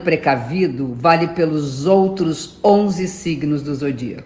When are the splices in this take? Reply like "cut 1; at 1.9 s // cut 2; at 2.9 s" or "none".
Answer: none